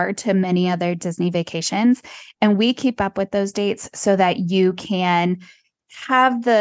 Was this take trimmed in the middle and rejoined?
no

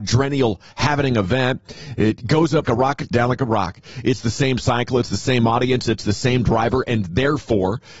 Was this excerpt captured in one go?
no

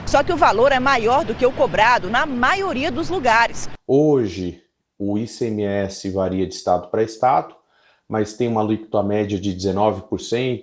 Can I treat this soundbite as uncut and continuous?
yes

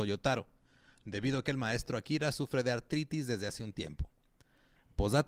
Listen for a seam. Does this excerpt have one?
no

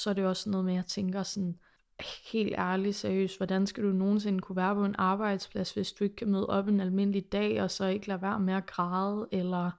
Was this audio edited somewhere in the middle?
no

